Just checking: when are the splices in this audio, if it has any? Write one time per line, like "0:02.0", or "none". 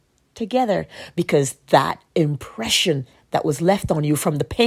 0:02.1